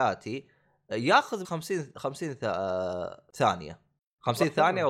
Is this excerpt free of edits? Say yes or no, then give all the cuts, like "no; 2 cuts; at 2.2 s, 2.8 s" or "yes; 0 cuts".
no; 2 cuts; at 1.4 s, 3.3 s